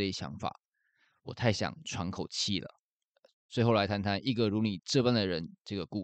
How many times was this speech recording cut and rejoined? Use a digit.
0